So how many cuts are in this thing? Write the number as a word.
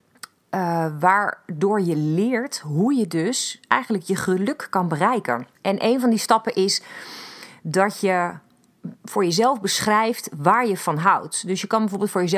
one